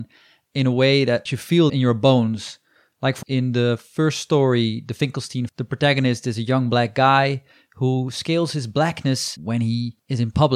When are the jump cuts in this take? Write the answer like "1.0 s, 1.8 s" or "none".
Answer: 1.3 s, 1.7 s, 3.2 s, 5.5 s, 9.4 s